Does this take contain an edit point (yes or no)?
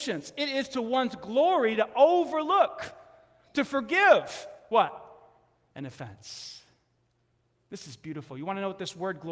no